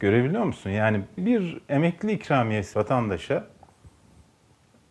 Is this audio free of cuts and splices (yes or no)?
no